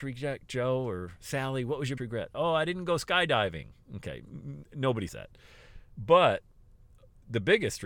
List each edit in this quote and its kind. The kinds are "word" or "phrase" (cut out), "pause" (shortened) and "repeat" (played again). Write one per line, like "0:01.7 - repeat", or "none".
0:02.0 - word
0:05.1 - word